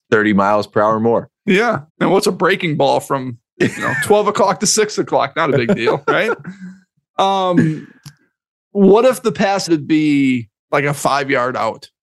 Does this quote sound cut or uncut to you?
cut